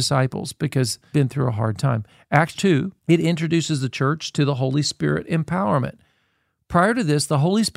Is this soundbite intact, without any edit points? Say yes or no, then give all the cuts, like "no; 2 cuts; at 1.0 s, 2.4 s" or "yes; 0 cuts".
no; 3 cuts; at 1.1 s, 2.5 s, 3.0 s